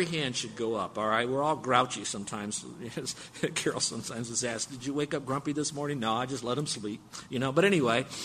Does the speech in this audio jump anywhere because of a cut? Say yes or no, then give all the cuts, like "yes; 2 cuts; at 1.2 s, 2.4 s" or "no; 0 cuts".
no; 0 cuts